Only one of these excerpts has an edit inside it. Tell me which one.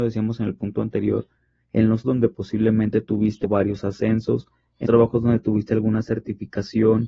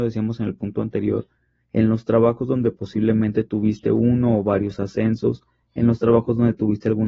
first; 3 cuts; at 2.0 s, 3.4 s, 4.8 s

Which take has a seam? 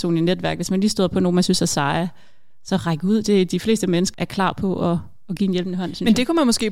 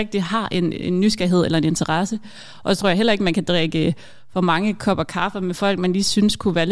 first; 1 cut; at 4.1 s

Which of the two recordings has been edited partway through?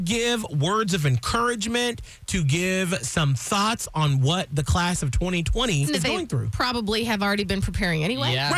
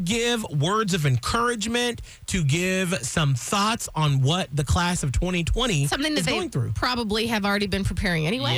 first; 1 cut; at 5.9 s

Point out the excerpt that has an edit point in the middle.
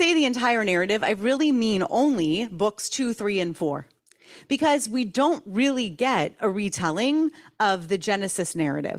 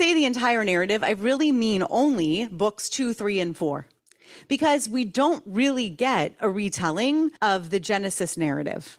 second; 1 cut; at 7.4 s

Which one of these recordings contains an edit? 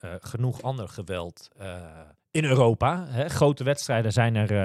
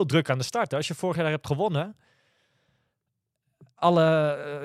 first; 1 cut; at 2.2 s

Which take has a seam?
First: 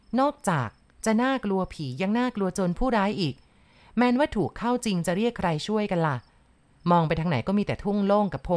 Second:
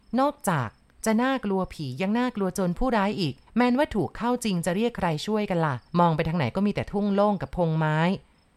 second; 2 cuts; at 3.5 s, 5.9 s

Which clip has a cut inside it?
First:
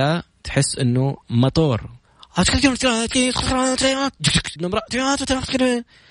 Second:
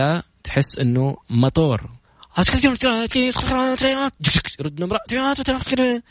first; 1 cut; at 4.6 s

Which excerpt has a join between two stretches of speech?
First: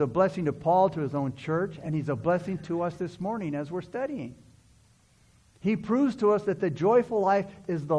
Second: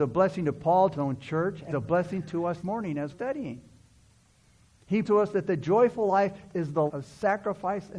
second; 6 cuts; at 0.9 s, 1.7 s, 2.6 s, 3.1 s, 5.0 s, 6.9 s

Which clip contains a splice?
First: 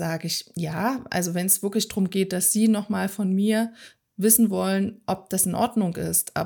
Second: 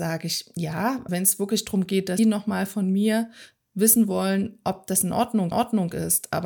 second; 3 cuts; at 1.1 s, 2.2 s, 5.5 s

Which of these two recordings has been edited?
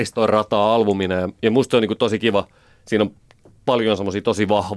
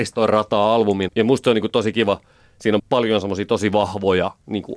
second; 2 cuts; at 1.1 s, 2.8 s

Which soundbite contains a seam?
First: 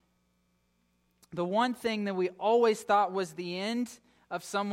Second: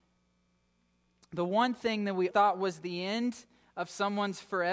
second; 1 cut; at 2.3 s

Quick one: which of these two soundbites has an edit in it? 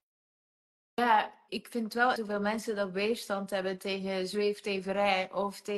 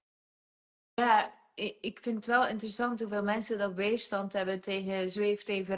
first; 2 cuts; at 1.5 s, 2.2 s

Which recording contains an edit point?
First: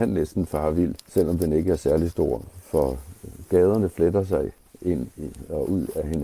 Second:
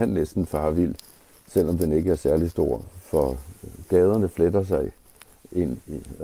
first; 2 cuts; at 1.0 s, 4.7 s

